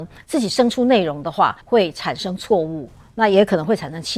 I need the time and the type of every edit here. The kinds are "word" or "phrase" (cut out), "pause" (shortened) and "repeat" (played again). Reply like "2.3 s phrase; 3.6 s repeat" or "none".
1.6 s pause